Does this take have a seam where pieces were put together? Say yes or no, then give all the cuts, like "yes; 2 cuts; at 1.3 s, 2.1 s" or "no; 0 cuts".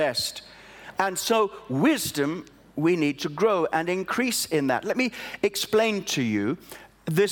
no; 0 cuts